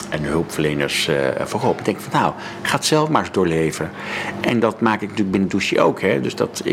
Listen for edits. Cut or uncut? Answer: uncut